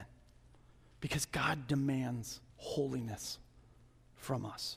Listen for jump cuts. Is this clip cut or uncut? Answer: cut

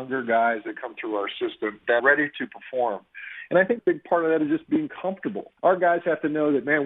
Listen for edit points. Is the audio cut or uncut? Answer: cut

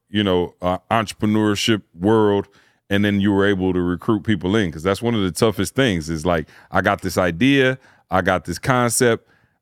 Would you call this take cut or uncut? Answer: uncut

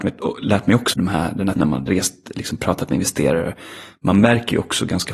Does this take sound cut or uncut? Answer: cut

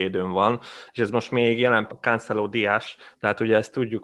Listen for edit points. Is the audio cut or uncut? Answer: cut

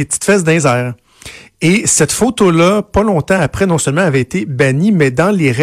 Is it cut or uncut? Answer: uncut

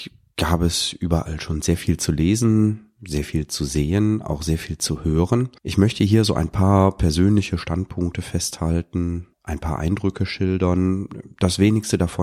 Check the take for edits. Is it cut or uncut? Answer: cut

